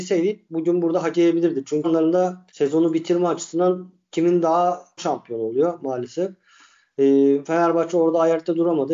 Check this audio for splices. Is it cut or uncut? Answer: cut